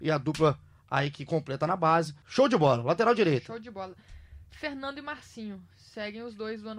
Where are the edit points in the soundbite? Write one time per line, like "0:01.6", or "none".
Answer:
0:02.2